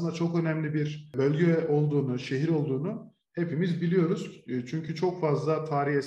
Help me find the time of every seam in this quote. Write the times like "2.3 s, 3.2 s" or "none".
none